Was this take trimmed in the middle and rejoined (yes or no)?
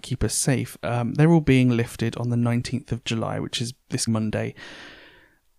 yes